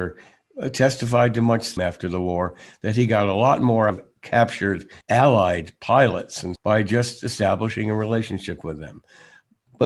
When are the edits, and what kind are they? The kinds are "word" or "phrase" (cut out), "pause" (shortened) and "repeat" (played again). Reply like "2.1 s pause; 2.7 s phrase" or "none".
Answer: 1.8 s word; 3.9 s word; 5.0 s pause; 6.6 s phrase